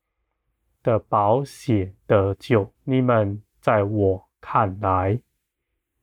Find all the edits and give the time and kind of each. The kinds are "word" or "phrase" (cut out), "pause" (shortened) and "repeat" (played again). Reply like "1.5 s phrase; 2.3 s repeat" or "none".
2.7 s pause

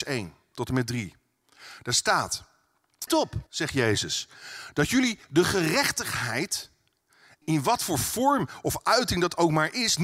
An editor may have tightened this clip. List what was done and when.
3.1 s word; 3.5 s pause; 7.4 s word

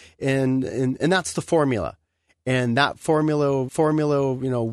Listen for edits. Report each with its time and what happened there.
1.0 s word; 3.7 s repeat

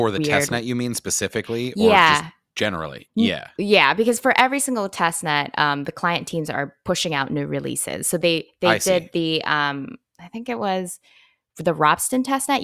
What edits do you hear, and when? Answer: none

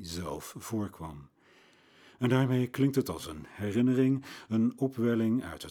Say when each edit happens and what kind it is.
none

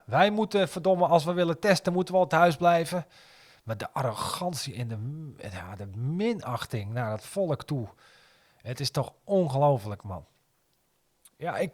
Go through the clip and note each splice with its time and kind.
none

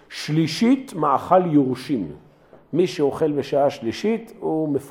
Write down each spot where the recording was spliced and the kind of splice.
none

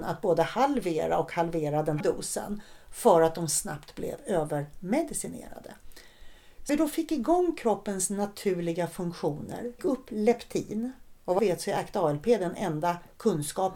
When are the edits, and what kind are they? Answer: 2.0 s word; 6.7 s word; 9.8 s word; 11.4 s word

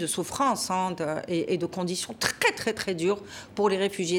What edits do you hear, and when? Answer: none

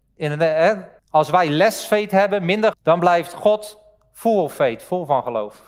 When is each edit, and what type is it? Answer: 1.0 s pause; 2.7 s phrase

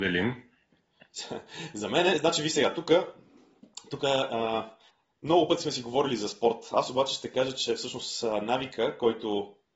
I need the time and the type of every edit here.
4.9 s pause

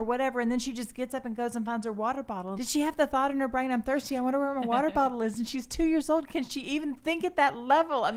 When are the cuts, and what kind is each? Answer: 2.6 s word

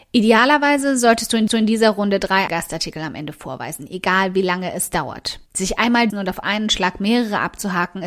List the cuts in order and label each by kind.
1.5 s repeat; 2.5 s word; 5.5 s pause; 6.1 s word

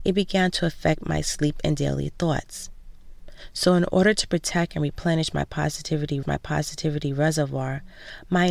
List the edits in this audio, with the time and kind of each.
6.2 s repeat

